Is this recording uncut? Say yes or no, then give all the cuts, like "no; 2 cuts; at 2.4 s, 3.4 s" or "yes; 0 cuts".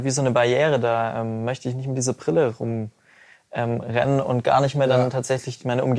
yes; 0 cuts